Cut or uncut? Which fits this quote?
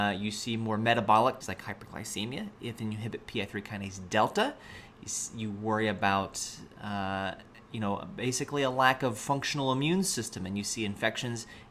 cut